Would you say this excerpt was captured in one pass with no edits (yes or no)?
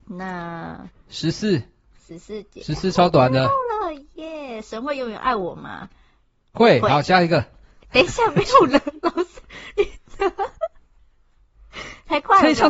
yes